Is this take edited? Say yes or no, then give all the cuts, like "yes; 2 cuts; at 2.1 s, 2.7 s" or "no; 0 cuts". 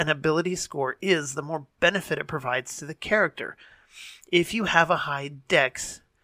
no; 0 cuts